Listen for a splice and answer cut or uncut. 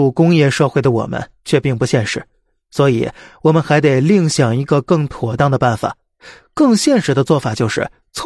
uncut